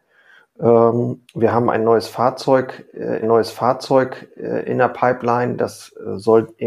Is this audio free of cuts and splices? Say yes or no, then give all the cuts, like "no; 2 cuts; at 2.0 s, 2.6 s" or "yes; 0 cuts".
no; 2 cuts; at 1.2 s, 3.2 s